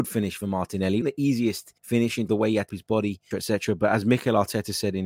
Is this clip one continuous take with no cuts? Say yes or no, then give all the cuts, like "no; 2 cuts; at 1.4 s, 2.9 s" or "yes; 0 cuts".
no; 5 cuts; at 1.0 s, 1.8 s, 2.3 s, 2.7 s, 3.3 s